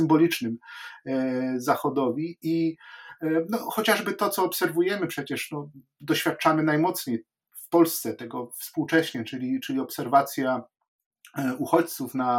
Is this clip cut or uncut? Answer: uncut